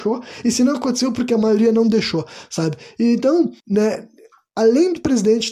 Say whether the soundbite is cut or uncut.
cut